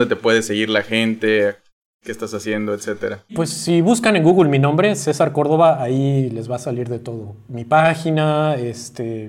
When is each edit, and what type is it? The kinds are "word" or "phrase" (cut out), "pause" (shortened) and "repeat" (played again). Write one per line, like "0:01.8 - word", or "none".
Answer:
none